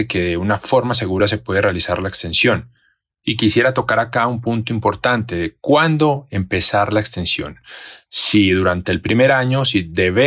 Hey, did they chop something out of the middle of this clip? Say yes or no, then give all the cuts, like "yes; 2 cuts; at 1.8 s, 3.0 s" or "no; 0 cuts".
no; 0 cuts